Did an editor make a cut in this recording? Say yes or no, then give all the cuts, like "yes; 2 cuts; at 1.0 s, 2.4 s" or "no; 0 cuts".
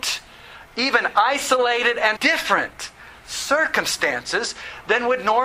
yes; 1 cut; at 2.2 s